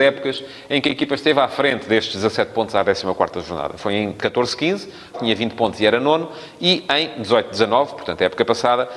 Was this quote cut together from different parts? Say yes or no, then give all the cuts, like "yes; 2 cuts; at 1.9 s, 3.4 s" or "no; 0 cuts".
yes; 1 cut; at 5.1 s